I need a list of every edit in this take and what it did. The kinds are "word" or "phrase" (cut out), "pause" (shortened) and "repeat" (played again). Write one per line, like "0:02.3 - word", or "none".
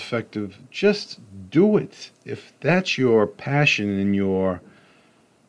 none